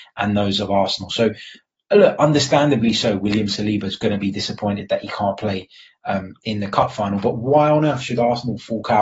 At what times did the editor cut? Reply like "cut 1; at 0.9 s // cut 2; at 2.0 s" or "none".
none